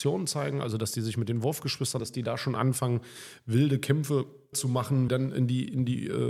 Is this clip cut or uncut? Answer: cut